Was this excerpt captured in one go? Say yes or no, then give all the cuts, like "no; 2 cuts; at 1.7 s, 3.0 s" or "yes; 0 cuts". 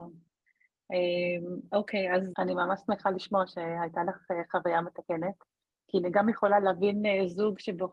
no; 1 cut; at 2.3 s